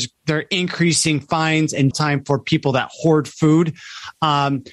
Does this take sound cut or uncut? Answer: cut